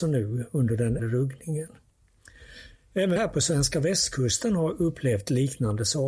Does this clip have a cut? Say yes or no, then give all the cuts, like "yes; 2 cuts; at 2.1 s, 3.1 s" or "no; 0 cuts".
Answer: yes; 2 cuts; at 1.0 s, 3.2 s